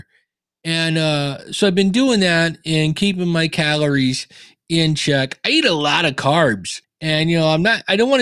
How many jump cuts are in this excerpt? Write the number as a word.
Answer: one